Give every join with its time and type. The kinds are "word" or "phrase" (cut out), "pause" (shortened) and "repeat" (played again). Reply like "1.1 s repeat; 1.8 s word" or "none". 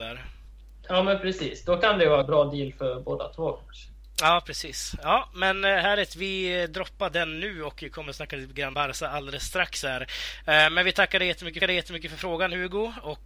2.2 s phrase; 8.7 s word; 11.6 s repeat